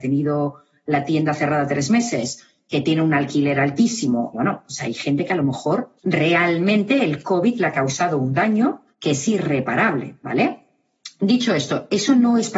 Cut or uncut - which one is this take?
cut